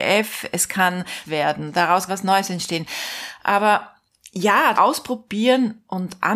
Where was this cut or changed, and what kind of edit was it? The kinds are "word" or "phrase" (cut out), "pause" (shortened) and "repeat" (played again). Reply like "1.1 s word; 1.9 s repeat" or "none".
1.3 s word; 2.1 s word; 4.8 s word